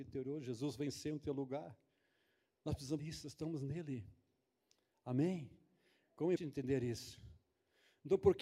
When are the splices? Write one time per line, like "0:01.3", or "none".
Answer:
0:03.0
0:06.4